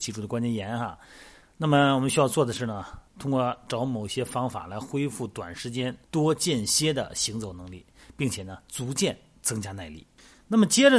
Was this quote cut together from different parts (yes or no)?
yes